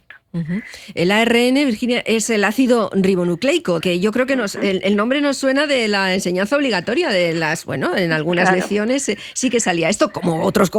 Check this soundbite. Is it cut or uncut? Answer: cut